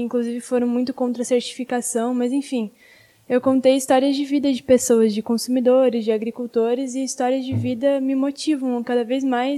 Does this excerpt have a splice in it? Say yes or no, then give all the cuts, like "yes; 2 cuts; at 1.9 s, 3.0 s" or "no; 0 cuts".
no; 0 cuts